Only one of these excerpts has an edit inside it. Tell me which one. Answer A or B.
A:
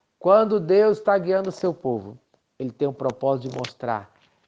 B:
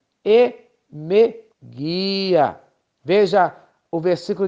B